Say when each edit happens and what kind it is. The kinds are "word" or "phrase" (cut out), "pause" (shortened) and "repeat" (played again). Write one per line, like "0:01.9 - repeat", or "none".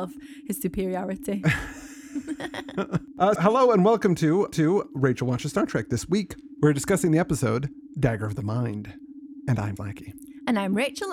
0:03.4 - word
0:04.5 - repeat
0:09.8 - word

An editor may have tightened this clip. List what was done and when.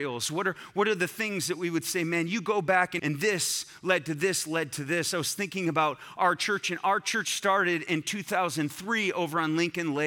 0:03.0 - word

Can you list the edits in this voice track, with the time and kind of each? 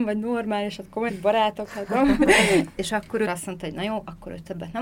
0:01.1 - word
0:02.8 - word
0:03.2 - word

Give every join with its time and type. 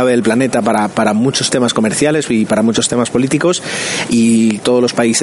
0:04.1 - word

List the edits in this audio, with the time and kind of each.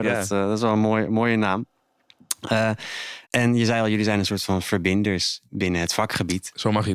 0:03.2 - pause
0:05.5 - word

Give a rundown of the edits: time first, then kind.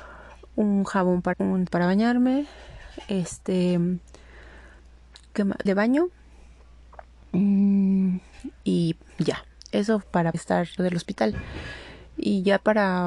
0:01.3 - word
0:01.7 - word
0:05.7 - word
0:10.0 - word
0:10.3 - word
0:10.8 - word

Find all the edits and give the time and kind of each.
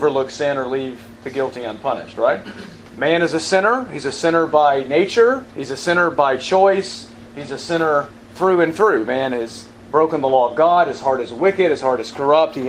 0:05.5 - pause

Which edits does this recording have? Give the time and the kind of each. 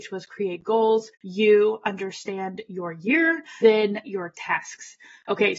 0:01.1 - pause
0:03.6 - word
0:04.1 - phrase

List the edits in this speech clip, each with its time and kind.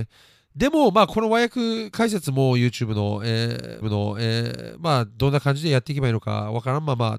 0:03.8 - repeat

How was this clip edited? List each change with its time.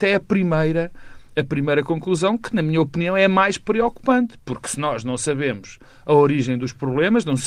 none

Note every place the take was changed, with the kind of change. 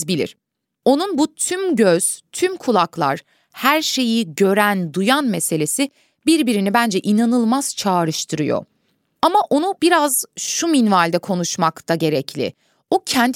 none

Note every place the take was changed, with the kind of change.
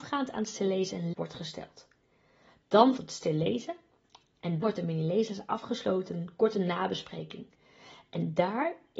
0:01.1 - word
0:03.0 - word
0:04.6 - word
0:06.1 - word

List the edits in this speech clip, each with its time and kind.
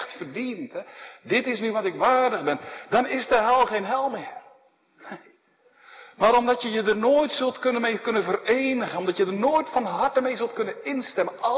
none

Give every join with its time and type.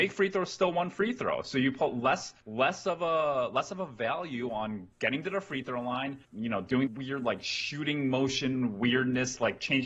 0:02.4 - pause
0:04.9 - pause
0:06.2 - pause
0:06.9 - phrase

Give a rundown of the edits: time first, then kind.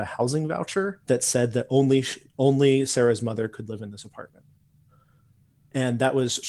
0:01.0 - pause

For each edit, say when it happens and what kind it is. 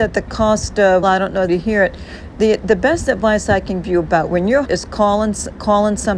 0:01.0 - word
0:01.5 - phrase
0:03.8 - word
0:04.6 - word

